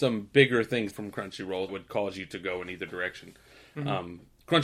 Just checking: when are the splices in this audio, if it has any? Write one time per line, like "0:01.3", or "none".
0:00.9
0:01.7